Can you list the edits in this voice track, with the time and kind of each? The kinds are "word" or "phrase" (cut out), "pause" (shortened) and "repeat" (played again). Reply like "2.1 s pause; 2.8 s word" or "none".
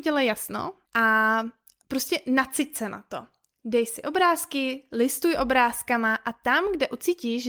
none